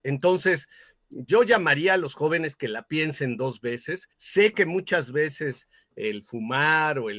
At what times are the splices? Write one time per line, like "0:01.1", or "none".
0:01.3
0:04.1